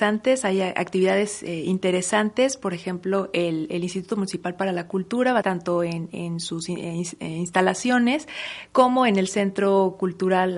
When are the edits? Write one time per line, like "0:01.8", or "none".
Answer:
0:05.4